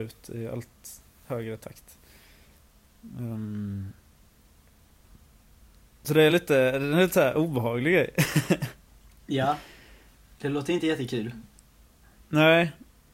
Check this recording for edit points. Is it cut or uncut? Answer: uncut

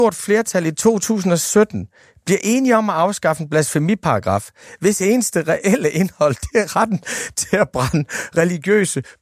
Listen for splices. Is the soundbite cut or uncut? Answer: uncut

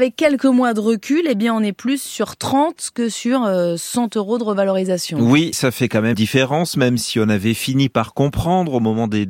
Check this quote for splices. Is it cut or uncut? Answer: cut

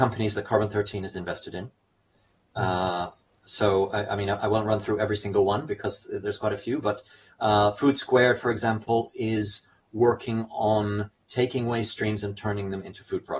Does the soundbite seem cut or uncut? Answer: uncut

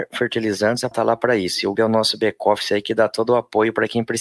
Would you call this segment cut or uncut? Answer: cut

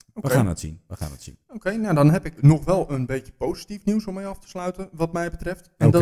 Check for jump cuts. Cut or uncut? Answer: cut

